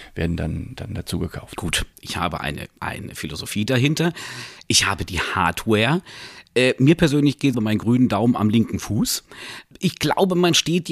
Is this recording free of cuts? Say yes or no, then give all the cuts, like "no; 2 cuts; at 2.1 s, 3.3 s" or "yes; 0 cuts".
no; 3 cuts; at 1.9 s, 2.8 s, 7.5 s